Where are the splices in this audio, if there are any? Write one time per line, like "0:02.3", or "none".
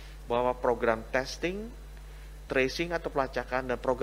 0:02.5